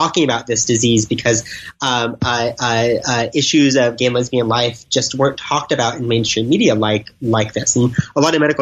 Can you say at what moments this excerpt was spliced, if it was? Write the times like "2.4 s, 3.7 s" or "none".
none